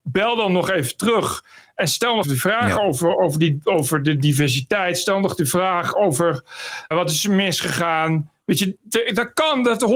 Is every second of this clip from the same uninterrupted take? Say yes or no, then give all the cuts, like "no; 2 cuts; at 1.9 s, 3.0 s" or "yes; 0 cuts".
no; 2 cuts; at 2.2 s, 6.9 s